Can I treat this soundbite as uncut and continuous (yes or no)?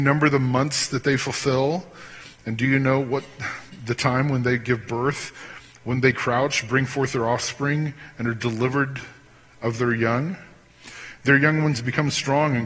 yes